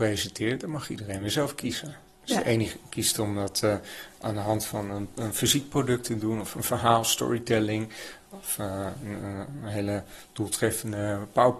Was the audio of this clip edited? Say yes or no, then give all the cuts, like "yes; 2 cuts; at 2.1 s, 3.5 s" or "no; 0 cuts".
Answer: no; 0 cuts